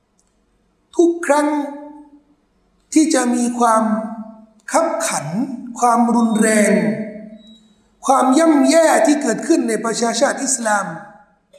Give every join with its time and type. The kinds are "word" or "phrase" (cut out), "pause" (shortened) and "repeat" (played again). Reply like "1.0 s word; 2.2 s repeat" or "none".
none